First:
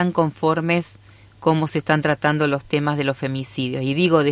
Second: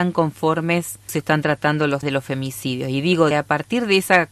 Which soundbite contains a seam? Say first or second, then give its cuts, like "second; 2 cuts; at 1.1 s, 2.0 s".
second; 3 cuts; at 1.1 s, 2.0 s, 3.3 s